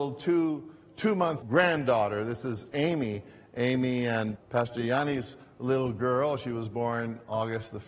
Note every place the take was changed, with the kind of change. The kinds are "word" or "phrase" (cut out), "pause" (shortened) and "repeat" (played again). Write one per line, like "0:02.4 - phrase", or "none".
0:01.4 - word
0:04.4 - word